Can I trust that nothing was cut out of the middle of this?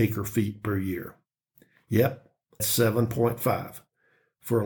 no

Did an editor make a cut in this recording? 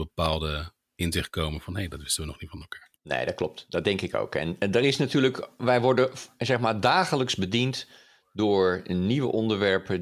yes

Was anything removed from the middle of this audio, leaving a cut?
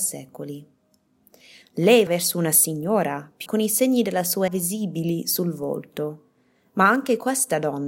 yes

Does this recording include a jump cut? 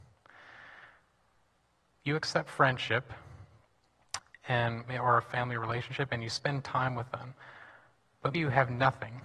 yes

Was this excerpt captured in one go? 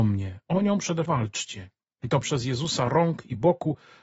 no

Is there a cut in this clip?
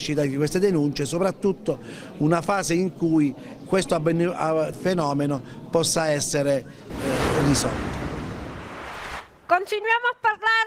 yes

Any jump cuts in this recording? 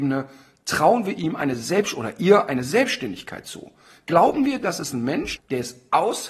yes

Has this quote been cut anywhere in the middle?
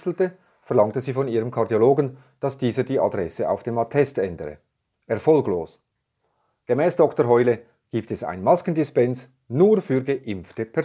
no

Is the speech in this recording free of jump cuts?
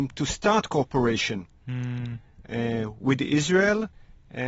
yes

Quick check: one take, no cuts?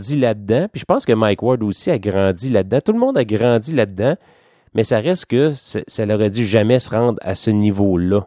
yes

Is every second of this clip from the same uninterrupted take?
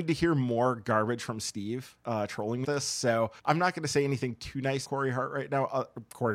no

